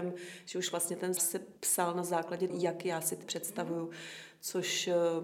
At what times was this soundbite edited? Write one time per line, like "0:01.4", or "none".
0:01.2
0:01.6
0:02.5
0:03.2